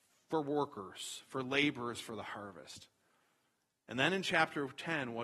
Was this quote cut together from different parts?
no; 0 cuts

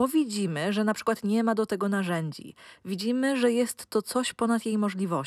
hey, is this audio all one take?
yes; 0 cuts

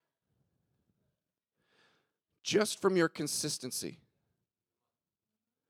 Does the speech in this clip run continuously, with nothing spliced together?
yes; 0 cuts

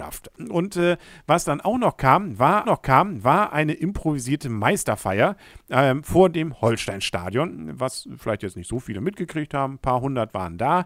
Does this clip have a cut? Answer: yes; 1 cut; at 2.6 s

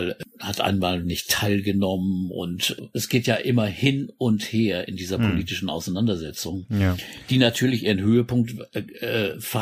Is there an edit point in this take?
no; 0 cuts

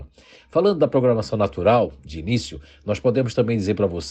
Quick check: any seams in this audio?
no; 0 cuts

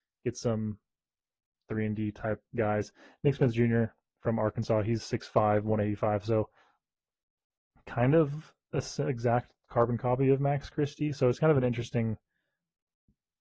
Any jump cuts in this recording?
yes; 2 cuts; at 1.5 s, 2.4 s

